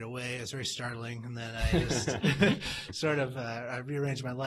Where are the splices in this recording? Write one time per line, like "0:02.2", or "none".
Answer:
none